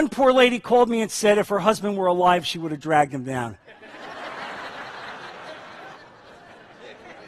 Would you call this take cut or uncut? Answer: cut